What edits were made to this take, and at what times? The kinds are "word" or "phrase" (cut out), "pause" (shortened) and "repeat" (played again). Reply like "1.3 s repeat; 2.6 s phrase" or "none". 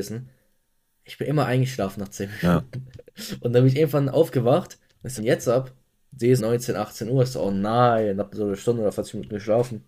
5.2 s phrase; 6.4 s word